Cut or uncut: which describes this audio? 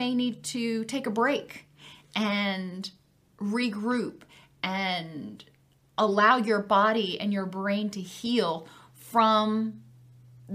uncut